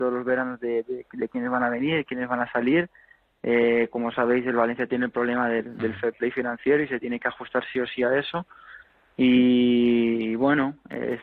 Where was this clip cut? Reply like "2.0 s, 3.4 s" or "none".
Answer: 3.9 s